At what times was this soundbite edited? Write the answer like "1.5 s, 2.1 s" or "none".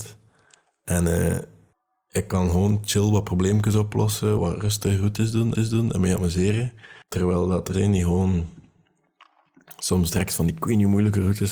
1.7 s, 4.4 s, 5.5 s, 7.0 s, 7.7 s

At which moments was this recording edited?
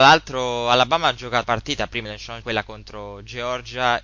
1.4 s, 2.1 s, 2.4 s

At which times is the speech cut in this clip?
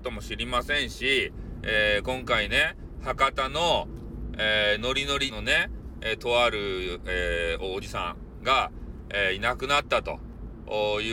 5.3 s

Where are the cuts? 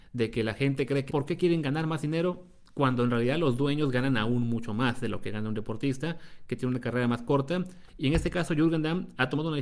1.1 s

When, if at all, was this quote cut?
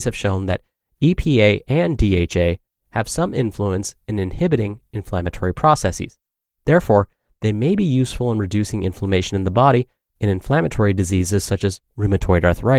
10.2 s

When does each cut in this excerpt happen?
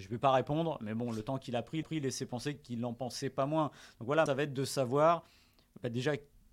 1.8 s, 4.3 s

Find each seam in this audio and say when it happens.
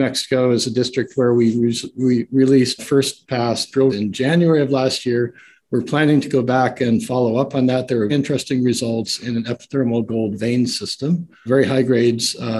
2.8 s, 3.9 s, 8.1 s, 11.5 s

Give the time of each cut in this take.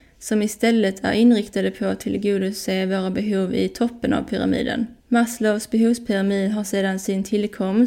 5.0 s

